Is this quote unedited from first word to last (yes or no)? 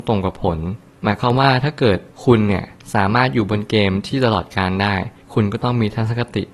yes